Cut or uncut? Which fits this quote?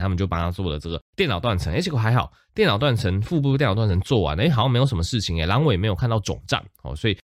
cut